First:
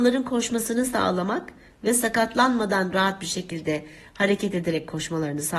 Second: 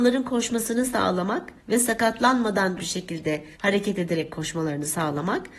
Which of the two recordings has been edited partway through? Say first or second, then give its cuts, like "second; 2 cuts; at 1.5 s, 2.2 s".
second; 3 cuts; at 1.6 s, 2.8 s, 3.5 s